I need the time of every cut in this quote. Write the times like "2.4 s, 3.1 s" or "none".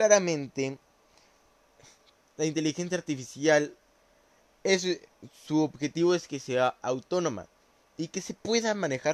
none